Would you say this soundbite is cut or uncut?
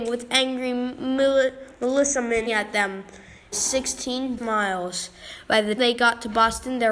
cut